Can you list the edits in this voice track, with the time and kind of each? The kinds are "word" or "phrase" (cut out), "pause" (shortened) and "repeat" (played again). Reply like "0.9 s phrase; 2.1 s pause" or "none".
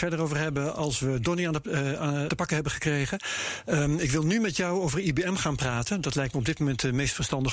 2.3 s word